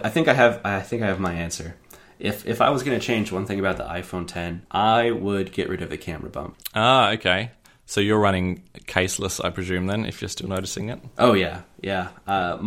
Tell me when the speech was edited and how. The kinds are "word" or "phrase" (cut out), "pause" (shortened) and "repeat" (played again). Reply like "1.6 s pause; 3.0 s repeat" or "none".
7.6 s pause